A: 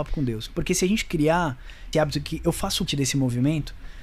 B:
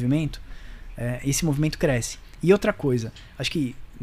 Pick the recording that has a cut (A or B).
A